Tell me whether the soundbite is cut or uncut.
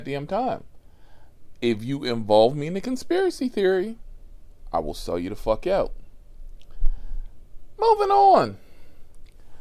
uncut